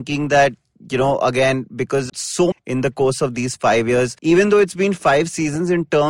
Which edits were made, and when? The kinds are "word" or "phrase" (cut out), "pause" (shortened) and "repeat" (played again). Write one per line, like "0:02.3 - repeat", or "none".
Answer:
0:02.1 - word
0:02.5 - phrase
0:04.2 - pause